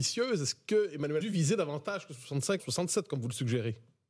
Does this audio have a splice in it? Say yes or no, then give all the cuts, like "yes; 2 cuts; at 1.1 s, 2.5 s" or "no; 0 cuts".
yes; 2 cuts; at 1.2 s, 2.6 s